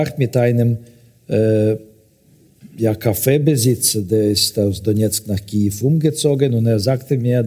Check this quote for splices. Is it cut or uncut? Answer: uncut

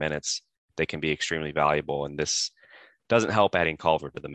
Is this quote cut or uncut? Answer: uncut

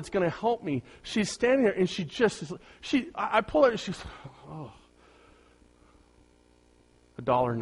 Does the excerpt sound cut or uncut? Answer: uncut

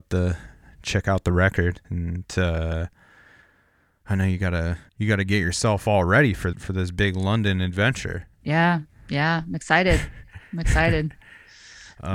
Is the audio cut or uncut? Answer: cut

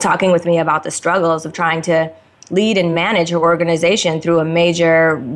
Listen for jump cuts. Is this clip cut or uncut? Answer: uncut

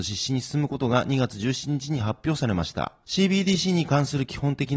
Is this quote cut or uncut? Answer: uncut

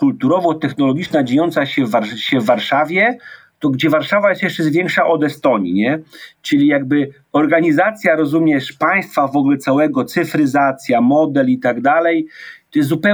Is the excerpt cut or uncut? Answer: uncut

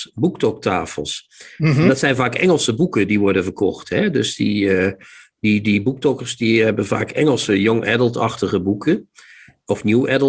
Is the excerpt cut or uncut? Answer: uncut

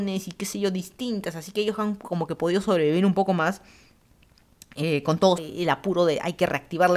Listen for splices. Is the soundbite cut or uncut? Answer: cut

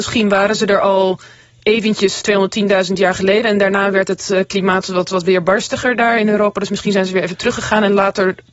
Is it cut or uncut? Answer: cut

